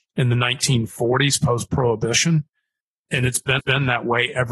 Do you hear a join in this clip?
yes; 1 cut; at 3.6 s

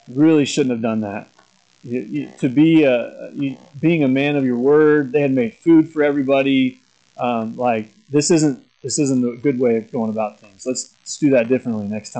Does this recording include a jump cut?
no; 0 cuts

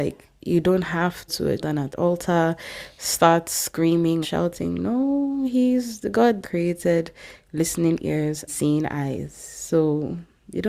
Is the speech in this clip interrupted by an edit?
yes; 6 cuts; at 1.3 s, 1.6 s, 1.9 s, 4.2 s, 6.4 s, 8.5 s

